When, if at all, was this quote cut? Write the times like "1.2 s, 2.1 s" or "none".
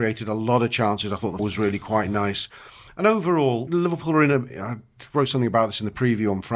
1.4 s, 3.7 s